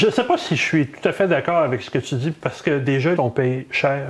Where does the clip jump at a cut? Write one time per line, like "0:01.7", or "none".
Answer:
0:02.6
0:03.2